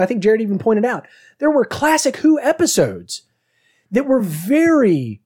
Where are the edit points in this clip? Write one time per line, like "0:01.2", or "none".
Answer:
none